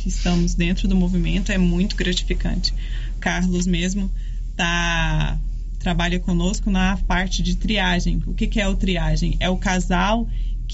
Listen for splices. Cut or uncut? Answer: uncut